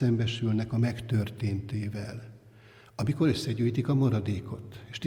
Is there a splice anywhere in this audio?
no; 0 cuts

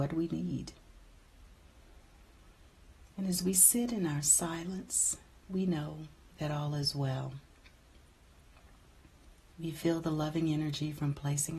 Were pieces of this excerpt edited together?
no; 0 cuts

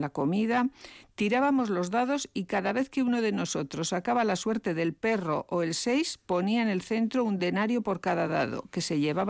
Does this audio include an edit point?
no; 0 cuts

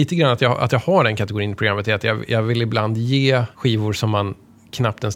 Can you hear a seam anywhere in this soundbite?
yes; 1 cut; at 3.5 s

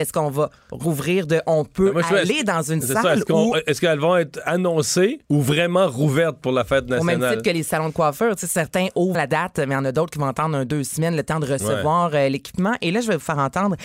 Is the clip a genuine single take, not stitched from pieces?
no; 2 cuts; at 5.2 s, 9.1 s

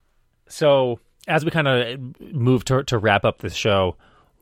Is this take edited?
no; 0 cuts

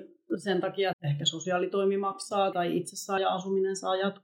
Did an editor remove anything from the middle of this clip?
yes; 3 cuts; at 0.9 s, 2.5 s, 3.2 s

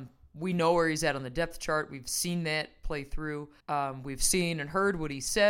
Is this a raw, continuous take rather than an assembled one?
no; 1 cut; at 3.6 s

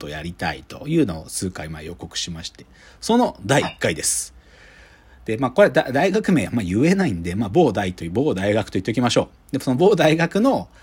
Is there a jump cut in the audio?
no; 0 cuts

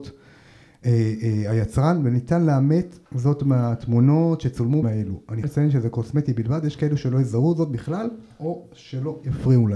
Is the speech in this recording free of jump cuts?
no; 3 cuts; at 3.1 s, 4.8 s, 5.4 s

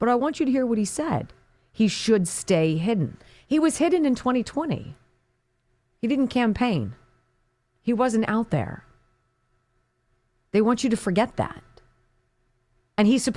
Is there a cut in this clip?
no; 0 cuts

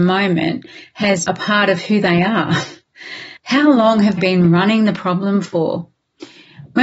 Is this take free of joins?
no; 3 cuts; at 1.3 s, 3.4 s, 4.2 s

